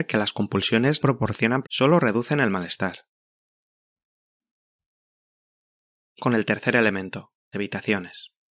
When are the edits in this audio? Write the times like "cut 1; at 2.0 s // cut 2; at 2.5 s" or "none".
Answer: cut 1; at 1.0 s // cut 2; at 1.6 s // cut 3; at 6.2 s // cut 4; at 7.5 s